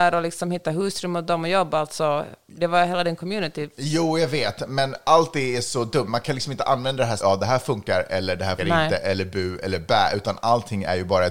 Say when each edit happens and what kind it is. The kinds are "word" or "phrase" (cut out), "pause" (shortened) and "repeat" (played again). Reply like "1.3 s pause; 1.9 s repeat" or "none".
7.2 s phrase; 8.6 s word